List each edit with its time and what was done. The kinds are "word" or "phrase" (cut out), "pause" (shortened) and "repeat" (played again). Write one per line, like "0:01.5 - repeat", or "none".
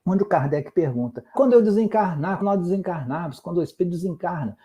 0:01.3 - word
0:02.4 - word